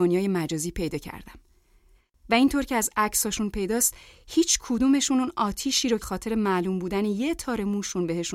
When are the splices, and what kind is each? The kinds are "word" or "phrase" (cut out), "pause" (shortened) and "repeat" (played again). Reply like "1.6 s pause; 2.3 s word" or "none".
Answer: 6.0 s word